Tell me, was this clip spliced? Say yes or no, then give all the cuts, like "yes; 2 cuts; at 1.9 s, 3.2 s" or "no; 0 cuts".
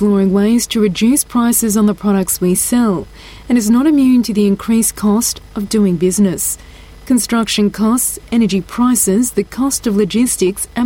no; 0 cuts